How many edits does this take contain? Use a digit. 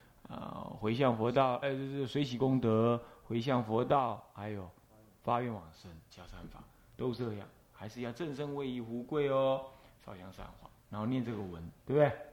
2